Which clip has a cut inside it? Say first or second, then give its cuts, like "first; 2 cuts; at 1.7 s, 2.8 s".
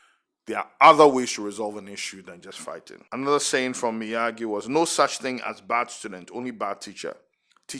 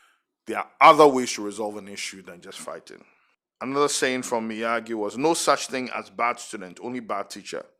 first; 1 cut; at 3.1 s